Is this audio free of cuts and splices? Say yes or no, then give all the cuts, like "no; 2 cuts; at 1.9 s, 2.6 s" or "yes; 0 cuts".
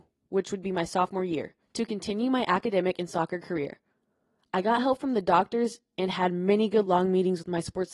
yes; 0 cuts